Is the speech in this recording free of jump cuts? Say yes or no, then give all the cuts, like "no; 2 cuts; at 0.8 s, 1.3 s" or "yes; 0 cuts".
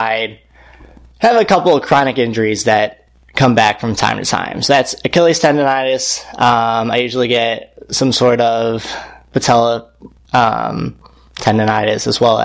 no; 1 cut; at 10.2 s